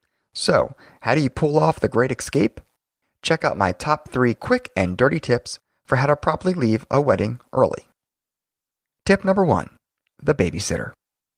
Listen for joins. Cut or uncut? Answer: uncut